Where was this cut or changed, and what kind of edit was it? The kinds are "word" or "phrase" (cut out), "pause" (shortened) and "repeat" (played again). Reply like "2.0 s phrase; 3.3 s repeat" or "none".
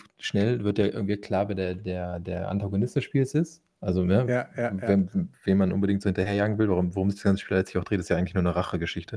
5.3 s word